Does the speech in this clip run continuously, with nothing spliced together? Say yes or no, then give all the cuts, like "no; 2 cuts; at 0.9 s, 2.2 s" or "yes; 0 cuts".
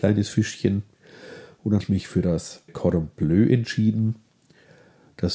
no; 2 cuts; at 1.8 s, 2.7 s